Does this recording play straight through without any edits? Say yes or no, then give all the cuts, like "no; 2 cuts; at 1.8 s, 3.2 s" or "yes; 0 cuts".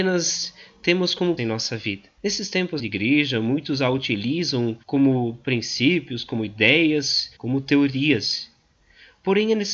no; 5 cuts; at 1.4 s, 2.2 s, 2.8 s, 4.8 s, 7.4 s